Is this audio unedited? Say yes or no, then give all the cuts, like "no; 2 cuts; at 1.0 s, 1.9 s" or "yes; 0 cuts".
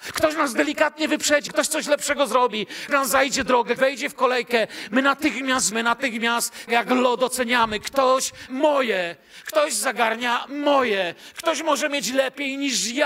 no; 6 cuts; at 1.5 s, 2.9 s, 3.8 s, 5.7 s, 6.7 s, 8.5 s